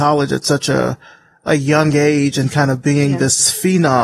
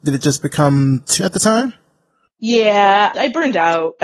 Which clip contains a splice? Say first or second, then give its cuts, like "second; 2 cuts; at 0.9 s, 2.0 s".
second; 1 cut; at 1.2 s